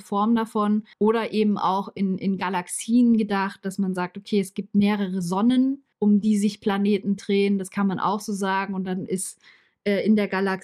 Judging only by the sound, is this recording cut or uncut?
cut